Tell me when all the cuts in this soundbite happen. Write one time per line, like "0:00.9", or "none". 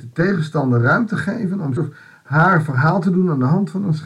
0:01.8